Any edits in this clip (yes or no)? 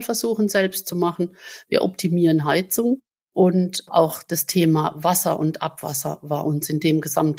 no